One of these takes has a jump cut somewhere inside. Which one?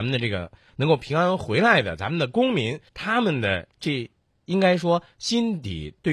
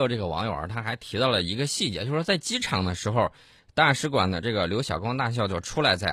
first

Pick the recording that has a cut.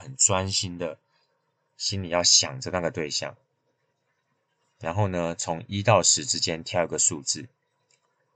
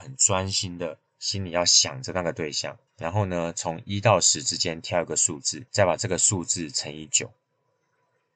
second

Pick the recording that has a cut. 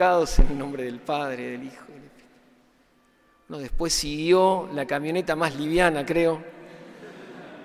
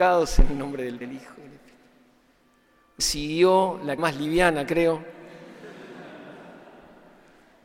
second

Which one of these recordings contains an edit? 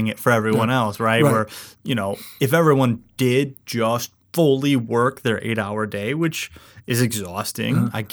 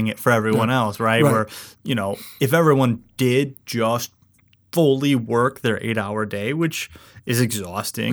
first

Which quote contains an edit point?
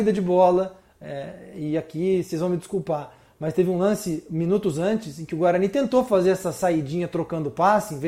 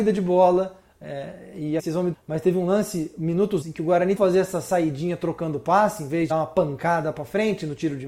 second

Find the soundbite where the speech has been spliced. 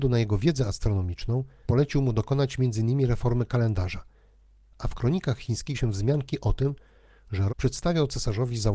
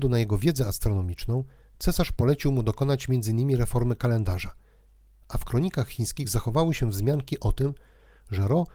first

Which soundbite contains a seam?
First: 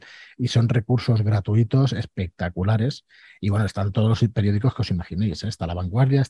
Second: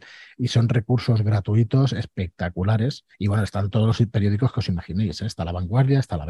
second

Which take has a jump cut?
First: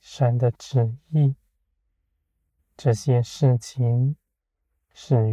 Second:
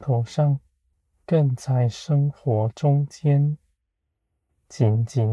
second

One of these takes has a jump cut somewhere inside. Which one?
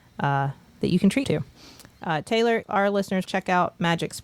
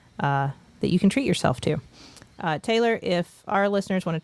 first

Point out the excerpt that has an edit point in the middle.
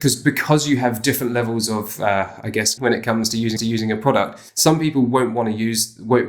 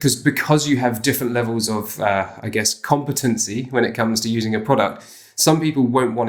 first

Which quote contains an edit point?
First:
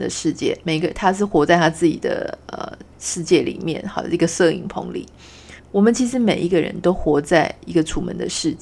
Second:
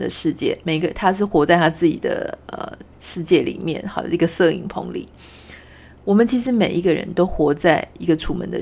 first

